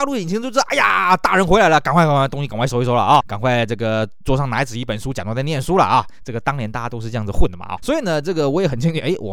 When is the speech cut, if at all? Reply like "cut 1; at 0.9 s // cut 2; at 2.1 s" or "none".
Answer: cut 1; at 3.2 s // cut 2; at 7.8 s